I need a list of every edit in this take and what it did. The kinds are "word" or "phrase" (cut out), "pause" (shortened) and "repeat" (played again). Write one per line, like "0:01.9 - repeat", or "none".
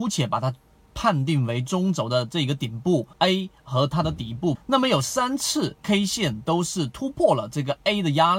0:03.1 - pause
0:04.5 - word
0:05.8 - pause